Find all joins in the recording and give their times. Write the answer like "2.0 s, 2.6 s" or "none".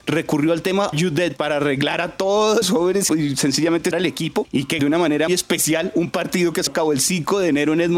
0.9 s, 1.4 s, 2.6 s, 3.1 s, 3.9 s, 4.8 s, 5.3 s, 6.7 s